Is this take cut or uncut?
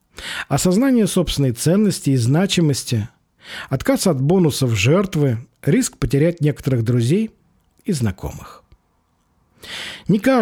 uncut